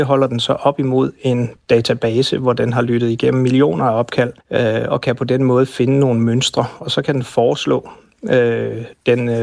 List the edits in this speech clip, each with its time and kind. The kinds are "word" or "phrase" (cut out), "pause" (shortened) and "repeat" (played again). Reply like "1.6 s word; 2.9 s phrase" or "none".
4.4 s pause